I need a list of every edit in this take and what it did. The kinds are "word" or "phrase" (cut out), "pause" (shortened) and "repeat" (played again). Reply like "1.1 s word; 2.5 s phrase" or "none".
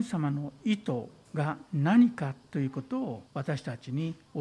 3.3 s pause